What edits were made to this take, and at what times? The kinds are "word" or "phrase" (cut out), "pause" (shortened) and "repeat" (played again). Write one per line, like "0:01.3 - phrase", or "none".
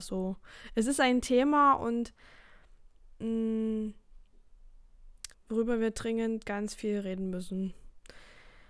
0:05.3 - pause

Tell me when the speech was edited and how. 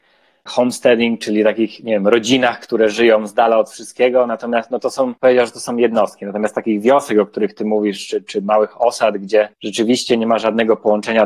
0:05.2 - pause
0:09.5 - pause

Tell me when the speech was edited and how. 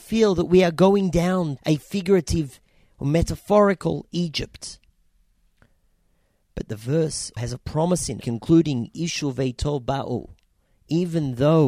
0:01.6 - word
0:07.4 - word
0:08.2 - phrase

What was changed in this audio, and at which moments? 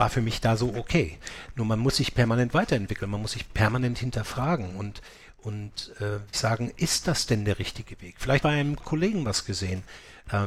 0:06.3 - word
0:08.4 - phrase
0:08.8 - word

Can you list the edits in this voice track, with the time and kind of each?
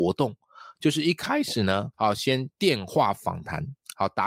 0:01.9 - pause

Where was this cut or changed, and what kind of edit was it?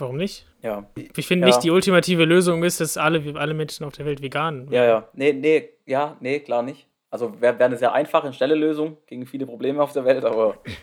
0:01.0 - word

